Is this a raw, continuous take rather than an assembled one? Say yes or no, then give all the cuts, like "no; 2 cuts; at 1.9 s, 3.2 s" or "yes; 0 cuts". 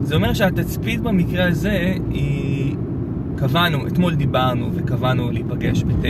yes; 0 cuts